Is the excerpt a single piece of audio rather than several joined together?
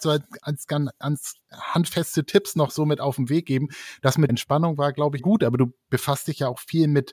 no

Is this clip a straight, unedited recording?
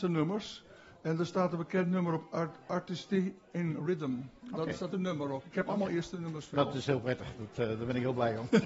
no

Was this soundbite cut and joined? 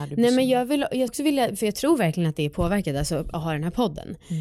yes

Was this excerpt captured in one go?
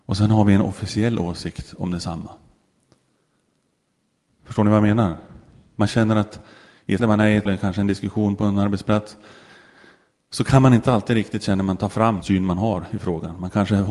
no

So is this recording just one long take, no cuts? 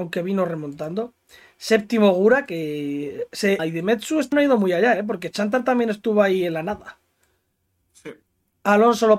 no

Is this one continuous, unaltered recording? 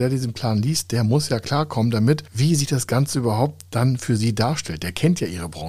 yes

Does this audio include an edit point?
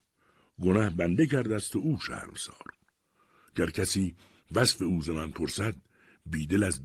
no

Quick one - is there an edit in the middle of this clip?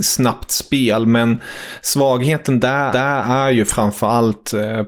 yes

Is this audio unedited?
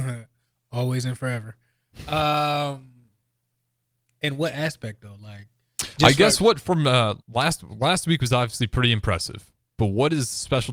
no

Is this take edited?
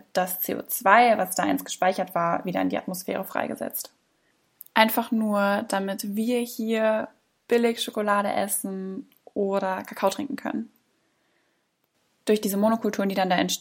no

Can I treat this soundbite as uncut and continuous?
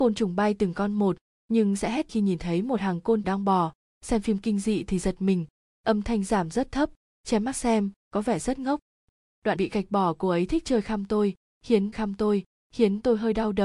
no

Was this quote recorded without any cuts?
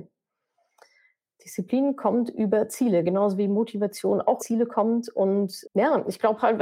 no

